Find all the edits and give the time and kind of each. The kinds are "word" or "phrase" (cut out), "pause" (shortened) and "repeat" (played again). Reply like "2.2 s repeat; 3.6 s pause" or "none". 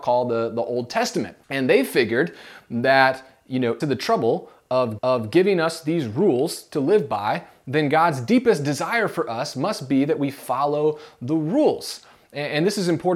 1.4 s pause; 3.8 s phrase; 5.0 s repeat